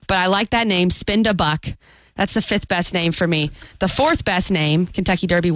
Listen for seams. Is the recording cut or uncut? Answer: uncut